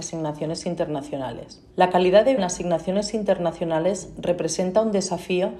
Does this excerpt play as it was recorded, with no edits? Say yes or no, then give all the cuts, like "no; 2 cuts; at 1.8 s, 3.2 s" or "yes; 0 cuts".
no; 2 cuts; at 1.7 s, 2.4 s